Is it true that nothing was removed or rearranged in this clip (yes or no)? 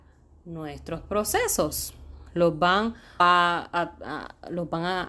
no